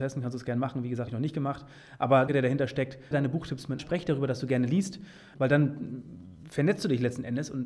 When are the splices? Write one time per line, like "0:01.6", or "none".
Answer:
0:01.1
0:02.3
0:03.1
0:03.8
0:05.3